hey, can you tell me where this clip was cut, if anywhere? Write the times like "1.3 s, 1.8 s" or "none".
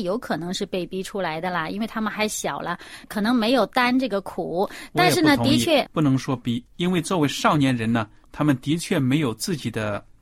3.0 s, 5.9 s, 6.7 s